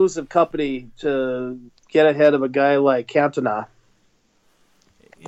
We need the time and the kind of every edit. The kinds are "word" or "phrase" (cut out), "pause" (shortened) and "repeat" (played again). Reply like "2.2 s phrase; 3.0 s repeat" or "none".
1.7 s pause

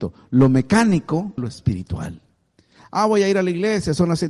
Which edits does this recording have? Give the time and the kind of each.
1.4 s word

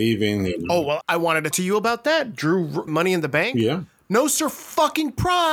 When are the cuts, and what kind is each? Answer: 1.0 s word; 1.5 s word; 2.9 s phrase

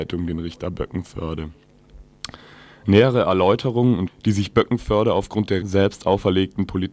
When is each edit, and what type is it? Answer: 4.1 s word; 5.6 s word

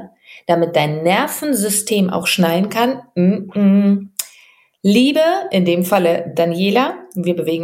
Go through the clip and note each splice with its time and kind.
none

